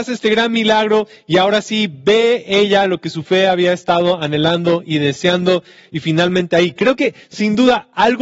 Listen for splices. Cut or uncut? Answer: uncut